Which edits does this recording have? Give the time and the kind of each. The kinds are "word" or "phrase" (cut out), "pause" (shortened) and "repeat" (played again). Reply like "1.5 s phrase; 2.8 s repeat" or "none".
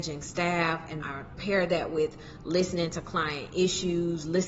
1.0 s word